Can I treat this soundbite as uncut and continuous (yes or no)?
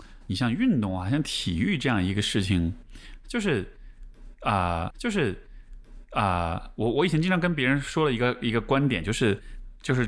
no